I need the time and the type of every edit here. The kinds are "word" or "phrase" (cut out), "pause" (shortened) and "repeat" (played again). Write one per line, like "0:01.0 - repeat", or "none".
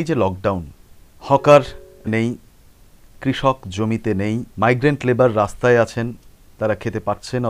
0:02.1 - word
0:04.5 - pause